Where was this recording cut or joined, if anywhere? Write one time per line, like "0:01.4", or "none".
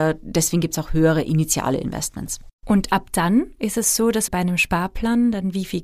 0:02.6
0:04.3

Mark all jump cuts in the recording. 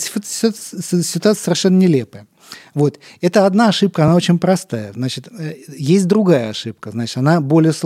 none

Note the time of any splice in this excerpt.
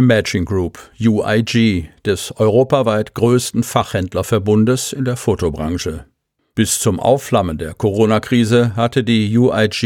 none

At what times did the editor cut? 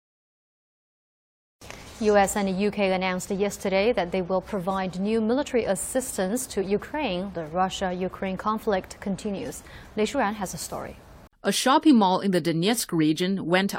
0:07.3
0:11.3

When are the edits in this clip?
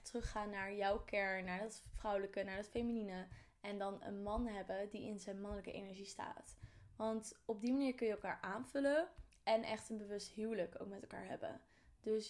none

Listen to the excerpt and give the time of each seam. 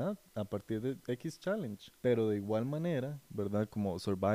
0:02.0

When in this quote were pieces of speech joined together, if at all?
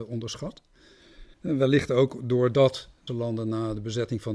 0:01.3
0:03.1

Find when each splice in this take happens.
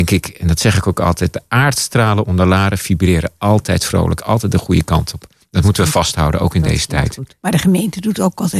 none

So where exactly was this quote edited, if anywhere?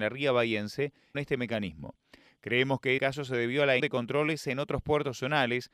0:01.1
0:03.0
0:03.8

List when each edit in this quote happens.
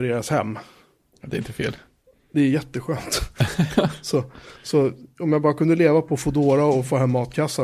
none

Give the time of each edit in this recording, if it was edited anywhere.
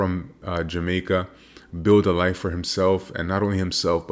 none

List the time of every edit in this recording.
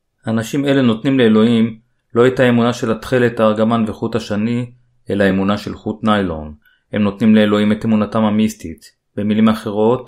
none

